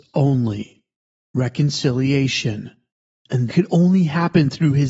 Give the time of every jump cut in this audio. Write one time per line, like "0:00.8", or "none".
0:03.5